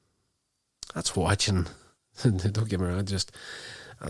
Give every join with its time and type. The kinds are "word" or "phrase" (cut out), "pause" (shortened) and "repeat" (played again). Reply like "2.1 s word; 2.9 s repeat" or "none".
1.1 s word